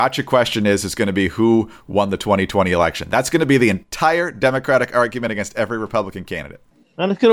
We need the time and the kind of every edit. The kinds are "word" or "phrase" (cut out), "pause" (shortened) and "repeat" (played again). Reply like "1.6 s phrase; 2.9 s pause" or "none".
none